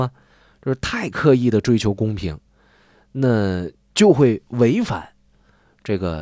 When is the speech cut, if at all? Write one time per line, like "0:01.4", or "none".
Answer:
none

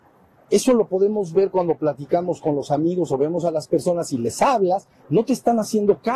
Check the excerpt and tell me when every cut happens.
none

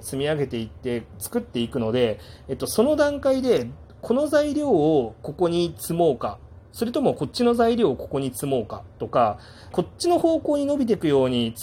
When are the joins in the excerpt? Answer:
0:09.7

